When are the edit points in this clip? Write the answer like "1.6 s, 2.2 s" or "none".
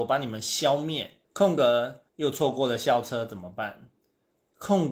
1.2 s, 2.1 s